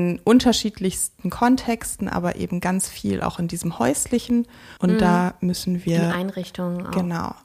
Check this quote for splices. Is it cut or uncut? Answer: cut